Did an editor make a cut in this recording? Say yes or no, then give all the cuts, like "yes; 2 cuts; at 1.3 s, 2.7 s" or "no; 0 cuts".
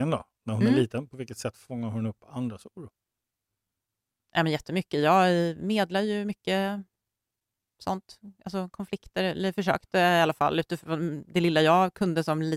no; 0 cuts